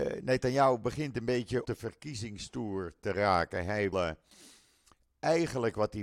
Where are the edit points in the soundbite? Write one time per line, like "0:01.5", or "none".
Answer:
0:01.6
0:03.9